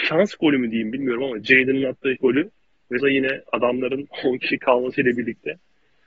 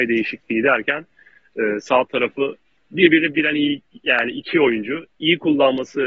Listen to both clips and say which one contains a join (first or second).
first